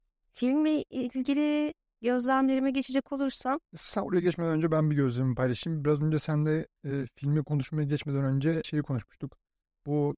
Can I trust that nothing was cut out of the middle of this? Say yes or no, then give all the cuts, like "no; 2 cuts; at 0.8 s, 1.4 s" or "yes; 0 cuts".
no; 2 cuts; at 3.6 s, 8.6 s